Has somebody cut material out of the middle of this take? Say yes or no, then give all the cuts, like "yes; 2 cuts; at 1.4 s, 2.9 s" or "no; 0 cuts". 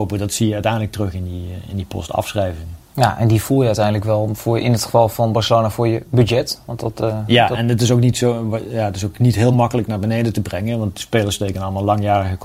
no; 0 cuts